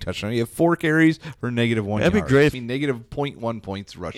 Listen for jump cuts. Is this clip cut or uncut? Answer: cut